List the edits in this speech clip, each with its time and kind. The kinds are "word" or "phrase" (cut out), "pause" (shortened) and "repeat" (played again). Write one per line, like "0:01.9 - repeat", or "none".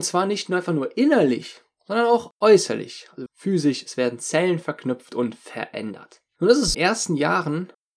0:03.3 - word
0:06.7 - phrase